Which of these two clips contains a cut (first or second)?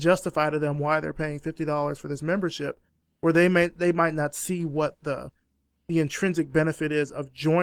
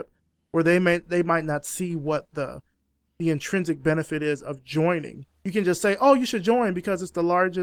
second